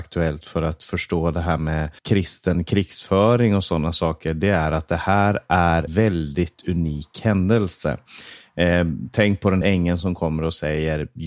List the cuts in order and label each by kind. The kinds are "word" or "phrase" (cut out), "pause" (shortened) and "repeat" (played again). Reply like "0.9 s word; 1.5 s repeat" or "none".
2.0 s pause; 5.9 s word; 9.6 s word